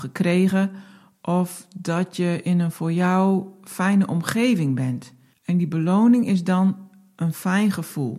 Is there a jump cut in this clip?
yes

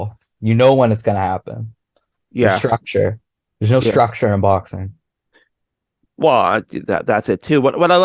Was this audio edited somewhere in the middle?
no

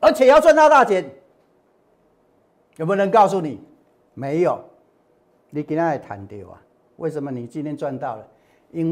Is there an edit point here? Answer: no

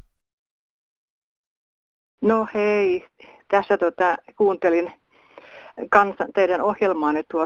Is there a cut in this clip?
no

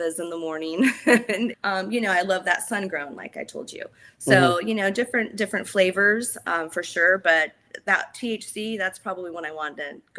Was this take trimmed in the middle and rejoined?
yes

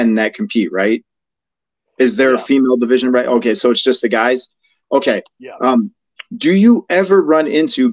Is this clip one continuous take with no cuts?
yes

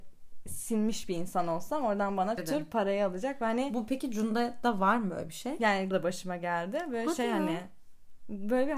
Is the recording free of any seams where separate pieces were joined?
no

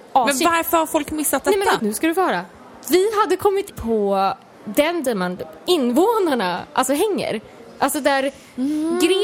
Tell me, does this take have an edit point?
yes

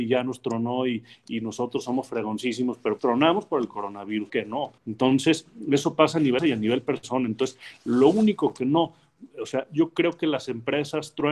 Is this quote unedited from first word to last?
no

